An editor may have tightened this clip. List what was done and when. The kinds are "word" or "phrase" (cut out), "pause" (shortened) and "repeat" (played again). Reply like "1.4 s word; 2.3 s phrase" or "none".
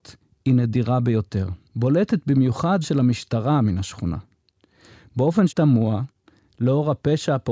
1.7 s pause; 2.8 s word; 5.5 s word